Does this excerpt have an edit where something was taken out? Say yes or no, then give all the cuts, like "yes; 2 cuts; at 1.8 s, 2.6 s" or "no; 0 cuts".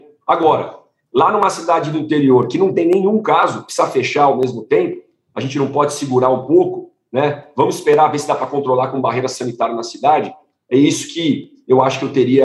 no; 0 cuts